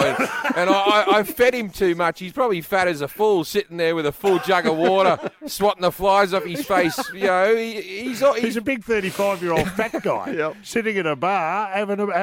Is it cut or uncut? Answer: uncut